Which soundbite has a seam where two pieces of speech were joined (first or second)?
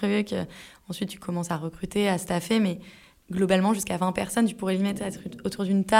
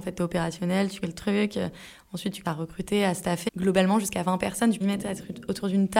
second